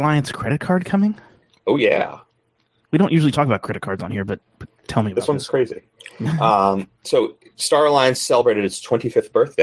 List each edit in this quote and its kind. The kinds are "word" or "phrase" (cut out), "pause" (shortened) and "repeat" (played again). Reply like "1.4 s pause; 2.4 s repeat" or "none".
none

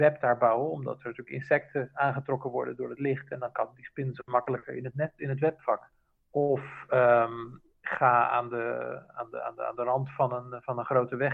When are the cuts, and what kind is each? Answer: none

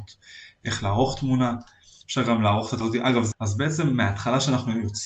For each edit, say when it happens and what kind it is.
2.8 s word; 3.3 s word

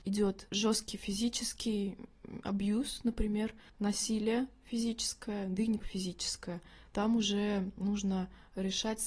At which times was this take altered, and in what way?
3.7 s pause; 5.8 s word

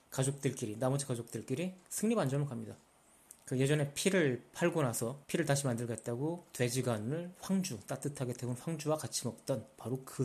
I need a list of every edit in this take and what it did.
5.2 s pause

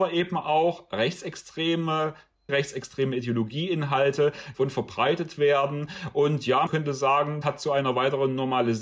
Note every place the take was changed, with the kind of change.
2.5 s word; 4.5 s word; 6.7 s word; 7.4 s word

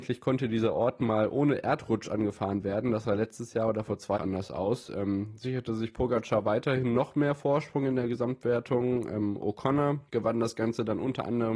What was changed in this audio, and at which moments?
4.1 s phrase; 10.1 s pause

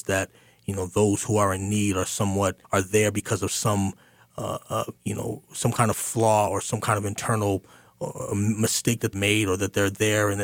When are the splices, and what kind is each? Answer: 2.6 s pause; 5.0 s pause; 9.1 s phrase

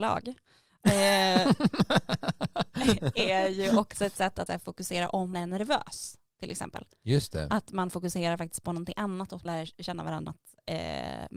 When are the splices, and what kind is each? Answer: 4.5 s word; 5.3 s word; 9.5 s word; 10.3 s word

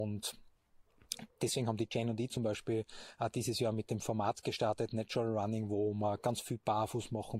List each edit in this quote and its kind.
none

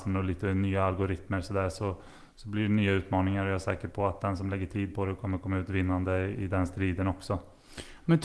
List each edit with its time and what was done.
none

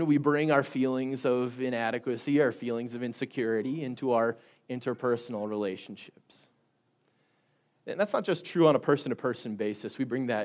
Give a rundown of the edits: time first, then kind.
none

